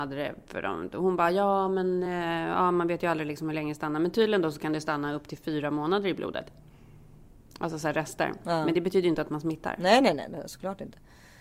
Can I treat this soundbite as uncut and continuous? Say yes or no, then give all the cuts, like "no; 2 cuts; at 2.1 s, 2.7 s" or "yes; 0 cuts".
yes; 0 cuts